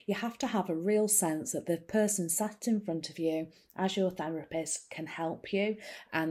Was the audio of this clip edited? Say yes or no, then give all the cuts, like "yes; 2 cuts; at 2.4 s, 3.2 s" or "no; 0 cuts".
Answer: no; 0 cuts